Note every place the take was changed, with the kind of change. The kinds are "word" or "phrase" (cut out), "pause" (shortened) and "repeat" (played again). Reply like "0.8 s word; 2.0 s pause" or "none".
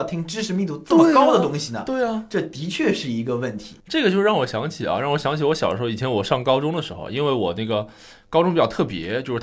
3.8 s pause